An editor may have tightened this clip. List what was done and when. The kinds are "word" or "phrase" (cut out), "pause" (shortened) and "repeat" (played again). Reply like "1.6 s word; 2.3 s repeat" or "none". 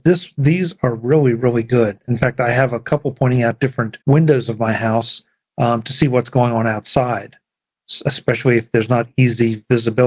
4.0 s pause